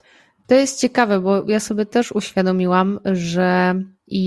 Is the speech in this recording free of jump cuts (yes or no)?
yes